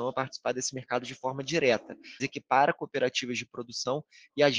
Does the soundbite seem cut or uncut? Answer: cut